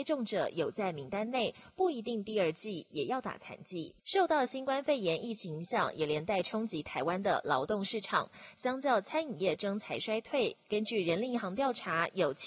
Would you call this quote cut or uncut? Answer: cut